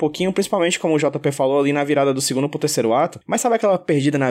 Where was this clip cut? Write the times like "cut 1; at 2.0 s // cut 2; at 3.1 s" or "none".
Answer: none